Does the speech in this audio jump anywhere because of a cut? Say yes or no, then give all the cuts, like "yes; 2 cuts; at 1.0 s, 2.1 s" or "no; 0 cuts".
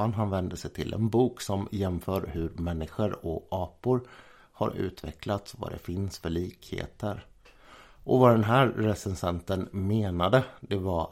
no; 0 cuts